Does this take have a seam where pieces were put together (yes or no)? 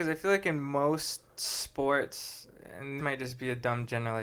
yes